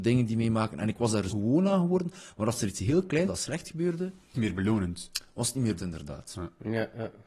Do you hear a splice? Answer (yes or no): yes